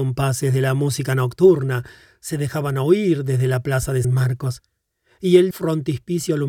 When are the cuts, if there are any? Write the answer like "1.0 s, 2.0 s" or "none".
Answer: 4.0 s, 5.5 s